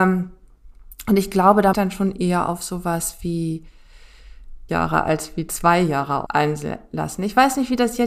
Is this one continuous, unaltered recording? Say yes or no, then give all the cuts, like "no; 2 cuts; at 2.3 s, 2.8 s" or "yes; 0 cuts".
no; 3 cuts; at 1.7 s, 4.7 s, 6.3 s